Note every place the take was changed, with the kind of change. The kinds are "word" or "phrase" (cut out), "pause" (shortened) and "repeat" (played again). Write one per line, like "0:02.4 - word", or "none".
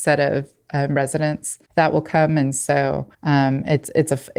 0:01.7 - pause
0:03.1 - pause